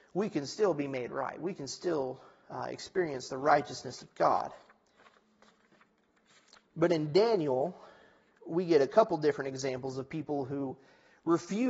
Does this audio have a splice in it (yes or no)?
no